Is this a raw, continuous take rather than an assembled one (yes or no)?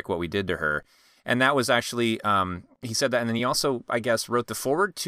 yes